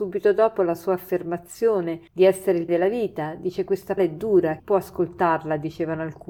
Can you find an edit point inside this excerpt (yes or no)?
yes